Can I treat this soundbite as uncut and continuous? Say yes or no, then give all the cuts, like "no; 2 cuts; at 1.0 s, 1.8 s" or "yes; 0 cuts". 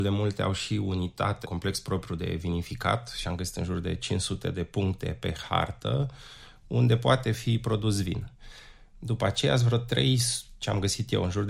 no; 2 cuts; at 1.4 s, 3.2 s